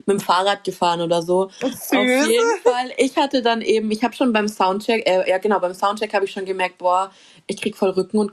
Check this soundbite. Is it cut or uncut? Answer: uncut